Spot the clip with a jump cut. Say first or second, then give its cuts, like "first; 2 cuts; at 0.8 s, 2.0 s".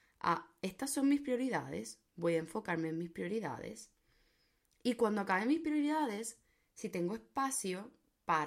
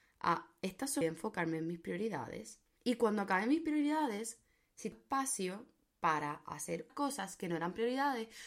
second; 4 cuts; at 1.0 s, 2.8 s, 4.9 s, 6.9 s